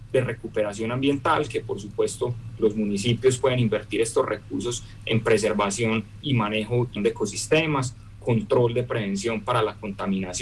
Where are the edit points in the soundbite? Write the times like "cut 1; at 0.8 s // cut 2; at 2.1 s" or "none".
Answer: cut 1; at 6.2 s // cut 2; at 7.0 s